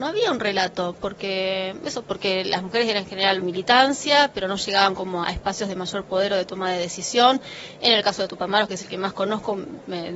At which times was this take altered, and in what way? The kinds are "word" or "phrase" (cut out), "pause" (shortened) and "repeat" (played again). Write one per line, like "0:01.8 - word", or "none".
0:03.4 - phrase
0:05.2 - word